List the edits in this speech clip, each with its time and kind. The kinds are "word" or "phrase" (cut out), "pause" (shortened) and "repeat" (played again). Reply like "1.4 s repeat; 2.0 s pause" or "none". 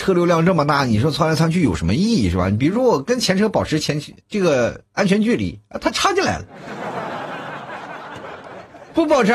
4.2 s pause